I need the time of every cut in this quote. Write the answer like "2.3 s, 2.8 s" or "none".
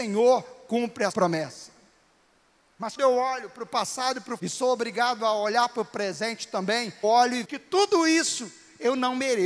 1.1 s, 3.0 s, 4.4 s, 7.0 s, 7.4 s

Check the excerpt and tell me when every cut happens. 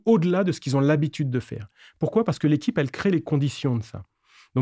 none

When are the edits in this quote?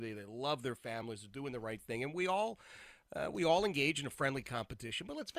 none

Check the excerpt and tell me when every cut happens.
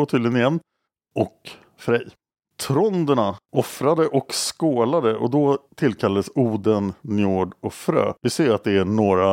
3.4 s, 5.7 s, 8.2 s

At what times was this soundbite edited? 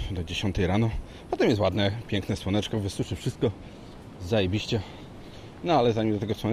none

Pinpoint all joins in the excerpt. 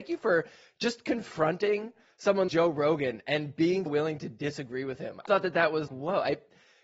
2.5 s, 3.9 s, 5.3 s, 5.9 s

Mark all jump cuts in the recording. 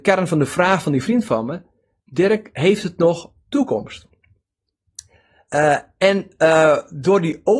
none

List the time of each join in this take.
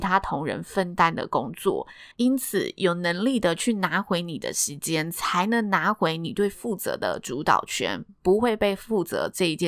2.1 s

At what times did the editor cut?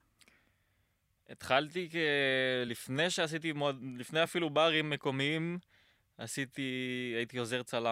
none

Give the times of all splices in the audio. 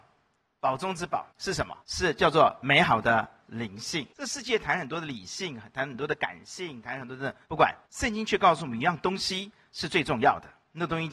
1.3 s, 1.8 s, 4.1 s, 7.4 s, 7.8 s

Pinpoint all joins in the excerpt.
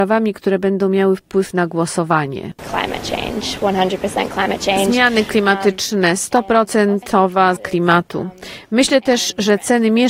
7.6 s

